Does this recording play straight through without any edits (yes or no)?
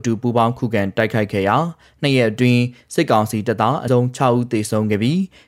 no